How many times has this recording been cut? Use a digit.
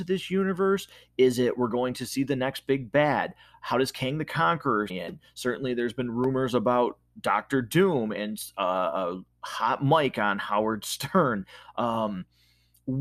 1